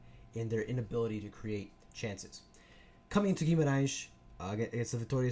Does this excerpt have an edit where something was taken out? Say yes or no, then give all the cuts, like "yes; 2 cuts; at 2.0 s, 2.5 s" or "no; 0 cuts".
no; 0 cuts